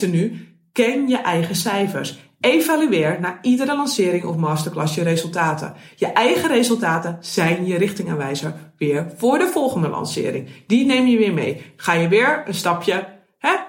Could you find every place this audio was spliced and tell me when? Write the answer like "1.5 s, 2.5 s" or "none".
none